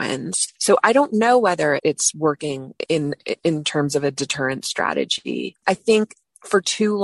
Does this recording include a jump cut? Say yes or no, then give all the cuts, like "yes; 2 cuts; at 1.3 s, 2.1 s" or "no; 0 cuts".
yes; 1 cut; at 1.8 s